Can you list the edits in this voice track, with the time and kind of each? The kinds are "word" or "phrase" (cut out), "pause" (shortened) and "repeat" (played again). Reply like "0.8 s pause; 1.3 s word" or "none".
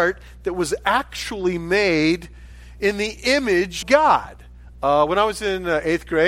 3.8 s word